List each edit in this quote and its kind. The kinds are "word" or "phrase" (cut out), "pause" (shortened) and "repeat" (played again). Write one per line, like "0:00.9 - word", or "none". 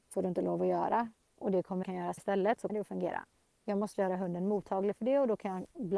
0:01.3 - pause
0:01.8 - phrase
0:02.2 - word
0:02.7 - word
0:03.3 - pause
0:03.9 - word